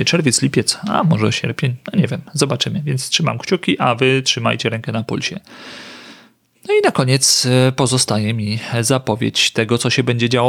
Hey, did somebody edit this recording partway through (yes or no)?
no